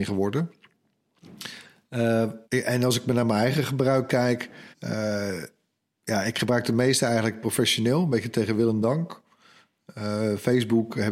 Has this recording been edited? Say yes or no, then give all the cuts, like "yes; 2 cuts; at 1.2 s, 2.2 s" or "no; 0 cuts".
yes; 2 cuts; at 2.4 s, 4.7 s